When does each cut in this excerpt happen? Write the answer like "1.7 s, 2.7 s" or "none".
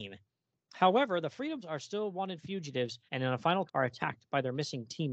1.6 s, 3.1 s, 3.7 s

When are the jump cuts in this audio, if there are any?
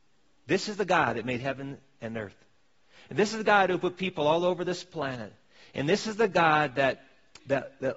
none

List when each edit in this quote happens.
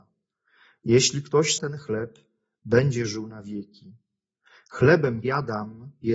1.6 s, 5.2 s

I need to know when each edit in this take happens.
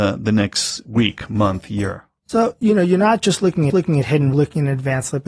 3.7 s, 4.3 s

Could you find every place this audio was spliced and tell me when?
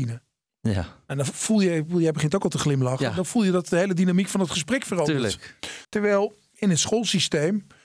5.8 s

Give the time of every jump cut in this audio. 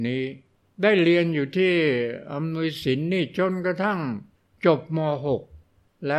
4.3 s

